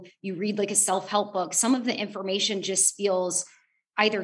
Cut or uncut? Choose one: uncut